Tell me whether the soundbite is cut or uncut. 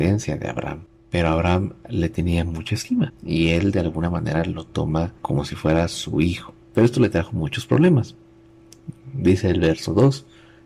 cut